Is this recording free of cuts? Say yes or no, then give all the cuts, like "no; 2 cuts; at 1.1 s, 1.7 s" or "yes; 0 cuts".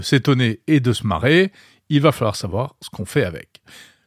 yes; 0 cuts